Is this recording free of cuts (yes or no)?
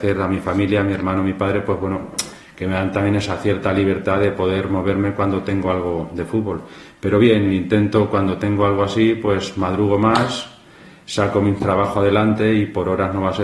yes